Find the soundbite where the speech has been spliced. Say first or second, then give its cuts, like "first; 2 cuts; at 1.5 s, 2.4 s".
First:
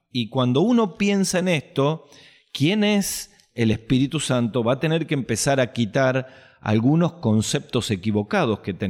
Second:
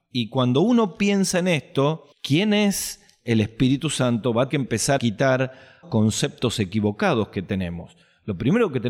second; 4 cuts; at 2.1 s, 4.5 s, 5.0 s, 5.8 s